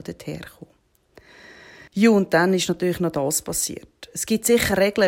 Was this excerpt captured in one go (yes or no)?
no